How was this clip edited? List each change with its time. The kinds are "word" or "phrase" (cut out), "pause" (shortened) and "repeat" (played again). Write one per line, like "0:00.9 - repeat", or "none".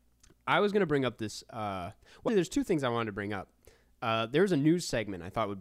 0:02.3 - word

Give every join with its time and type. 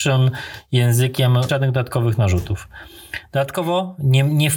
0:01.5 - phrase

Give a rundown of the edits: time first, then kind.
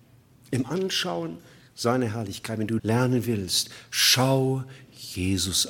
0:02.8 - word

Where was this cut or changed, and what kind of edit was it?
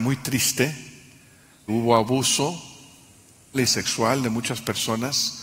0:01.7 - word
0:03.5 - word

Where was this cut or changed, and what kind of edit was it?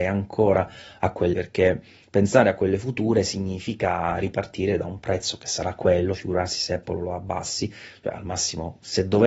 0:01.3 - word

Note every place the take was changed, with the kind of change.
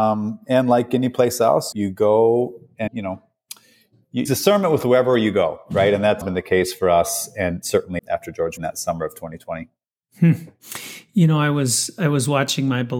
0:01.7 - word
0:02.9 - word
0:04.3 - word
0:06.2 - word
0:07.6 - word
0:08.0 - word
0:08.6 - word

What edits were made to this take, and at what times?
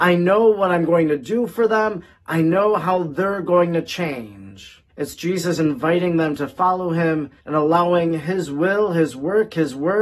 0:04.9 - pause
0:07.4 - pause

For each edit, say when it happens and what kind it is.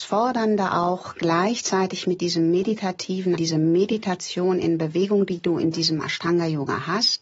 0:03.3 - word

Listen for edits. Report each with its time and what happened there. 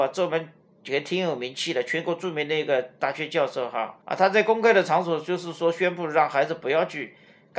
0:04.0 - pause

